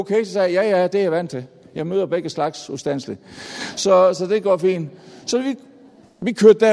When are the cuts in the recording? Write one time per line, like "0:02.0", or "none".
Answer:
none